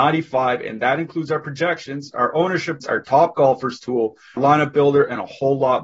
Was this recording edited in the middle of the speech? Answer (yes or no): yes